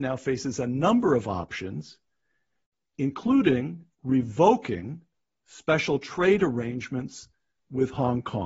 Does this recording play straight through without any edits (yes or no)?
yes